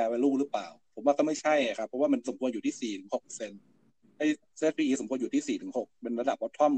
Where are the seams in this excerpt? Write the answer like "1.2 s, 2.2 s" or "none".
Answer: none